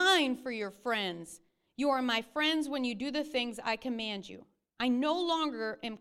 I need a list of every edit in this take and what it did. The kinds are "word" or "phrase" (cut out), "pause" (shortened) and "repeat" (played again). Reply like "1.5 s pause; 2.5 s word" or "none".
none